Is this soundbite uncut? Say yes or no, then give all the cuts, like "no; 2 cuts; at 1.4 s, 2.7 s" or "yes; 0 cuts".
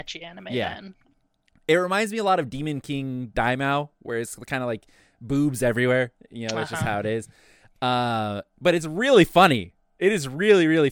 yes; 0 cuts